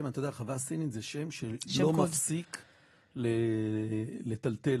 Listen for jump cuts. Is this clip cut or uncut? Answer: uncut